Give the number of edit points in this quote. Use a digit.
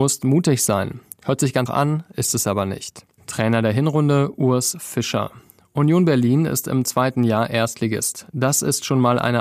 1